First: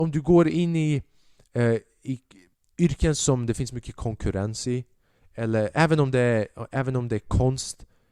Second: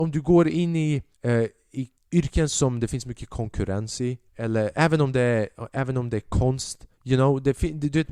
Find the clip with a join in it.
second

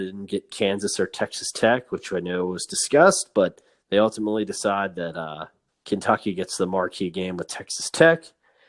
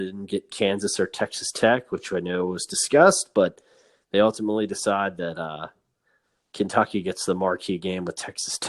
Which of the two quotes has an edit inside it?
first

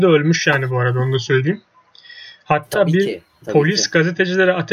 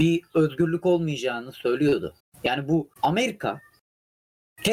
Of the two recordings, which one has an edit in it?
second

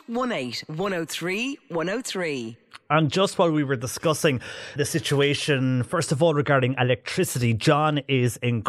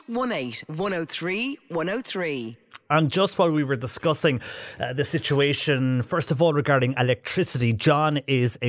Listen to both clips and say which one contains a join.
first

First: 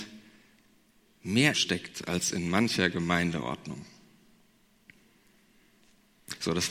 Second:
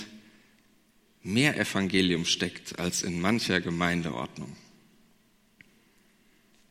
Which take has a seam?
first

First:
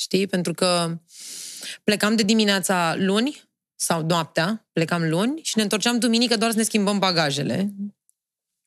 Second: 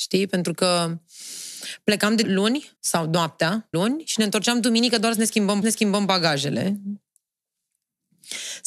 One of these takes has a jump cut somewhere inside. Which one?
second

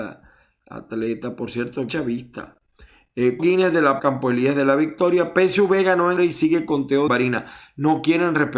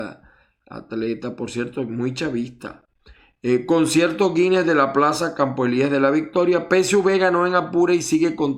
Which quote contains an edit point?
first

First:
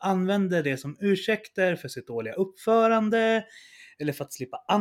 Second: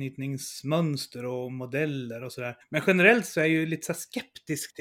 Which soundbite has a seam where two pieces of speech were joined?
second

